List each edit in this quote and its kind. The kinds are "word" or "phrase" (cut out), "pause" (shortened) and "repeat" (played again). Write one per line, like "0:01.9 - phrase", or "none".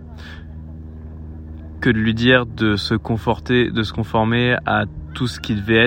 0:01.8 - word